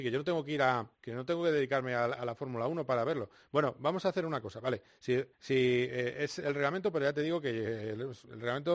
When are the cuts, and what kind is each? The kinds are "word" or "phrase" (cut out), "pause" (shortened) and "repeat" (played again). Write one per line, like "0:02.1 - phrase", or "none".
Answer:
0:00.9 - pause
0:05.3 - pause

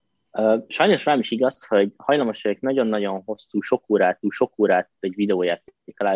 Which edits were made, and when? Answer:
0:04.2 - repeat

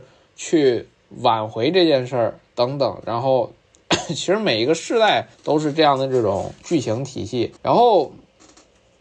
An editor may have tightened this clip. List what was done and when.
0:05.3 - pause
0:07.6 - pause

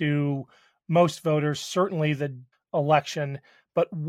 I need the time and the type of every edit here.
0:02.5 - word

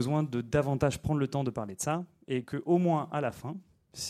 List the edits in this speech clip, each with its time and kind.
none

